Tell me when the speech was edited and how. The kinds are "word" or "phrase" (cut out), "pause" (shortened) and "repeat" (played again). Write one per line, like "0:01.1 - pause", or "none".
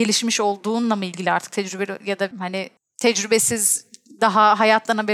0:02.3 - word
0:02.8 - pause